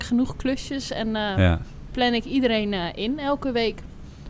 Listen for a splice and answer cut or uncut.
uncut